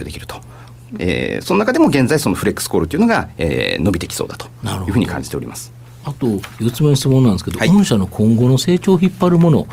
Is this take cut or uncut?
uncut